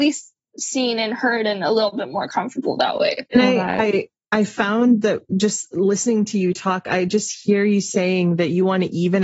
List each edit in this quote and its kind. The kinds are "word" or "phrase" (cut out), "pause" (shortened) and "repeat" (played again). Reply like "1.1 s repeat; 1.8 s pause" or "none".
3.3 s pause

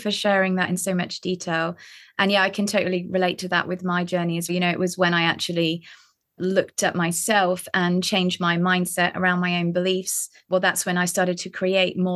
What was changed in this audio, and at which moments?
4.5 s word; 6.4 s word; 10.5 s word

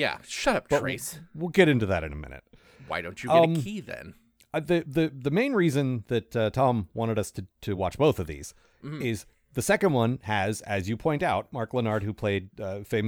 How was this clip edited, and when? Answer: none

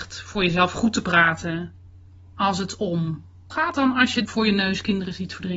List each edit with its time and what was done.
3.5 s word; 4.2 s word

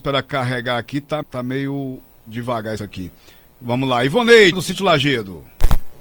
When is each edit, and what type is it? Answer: 1.2 s word; 2.8 s phrase; 4.5 s word

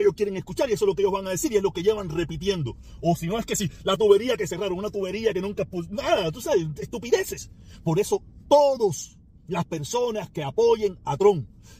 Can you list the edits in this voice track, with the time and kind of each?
none

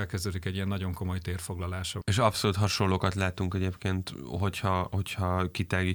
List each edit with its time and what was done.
none

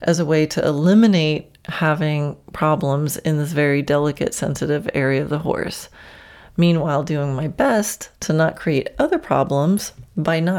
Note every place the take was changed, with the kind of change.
none

